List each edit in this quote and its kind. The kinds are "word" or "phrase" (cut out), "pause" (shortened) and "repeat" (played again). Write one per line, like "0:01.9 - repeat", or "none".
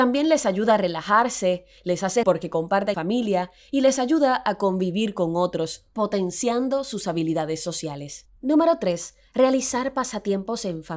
0:02.2 - word
0:02.9 - word
0:08.4 - pause